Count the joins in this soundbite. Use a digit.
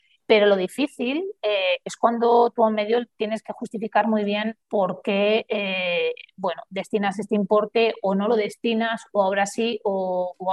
1